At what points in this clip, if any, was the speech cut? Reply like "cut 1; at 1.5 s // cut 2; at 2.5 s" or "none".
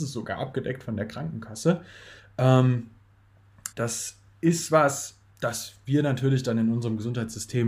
cut 1; at 3.7 s // cut 2; at 5.3 s